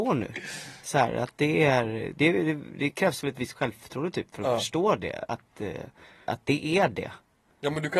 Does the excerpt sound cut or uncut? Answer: cut